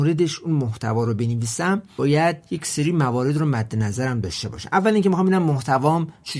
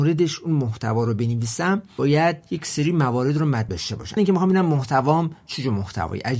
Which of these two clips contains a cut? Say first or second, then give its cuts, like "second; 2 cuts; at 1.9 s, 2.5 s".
second; 2 cuts; at 3.7 s, 4.2 s